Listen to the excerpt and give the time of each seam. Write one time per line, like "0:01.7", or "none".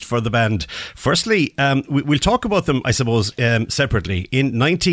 none